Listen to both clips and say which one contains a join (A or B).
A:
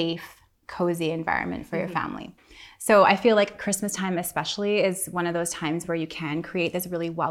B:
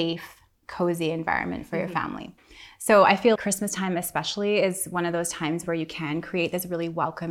B